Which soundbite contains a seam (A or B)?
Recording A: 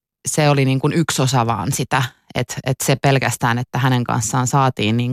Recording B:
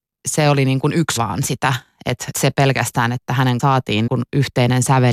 B